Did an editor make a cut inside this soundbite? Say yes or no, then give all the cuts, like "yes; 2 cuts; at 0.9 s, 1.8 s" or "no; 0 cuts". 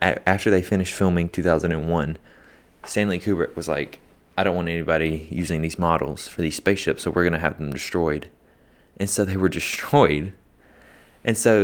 no; 0 cuts